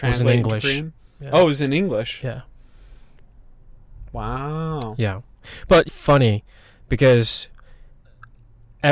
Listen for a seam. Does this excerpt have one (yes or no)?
yes